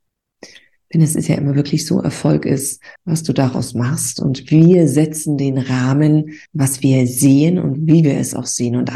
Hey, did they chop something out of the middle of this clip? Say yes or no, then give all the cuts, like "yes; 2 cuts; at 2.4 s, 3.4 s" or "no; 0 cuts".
yes; 2 cuts; at 3.0 s, 6.5 s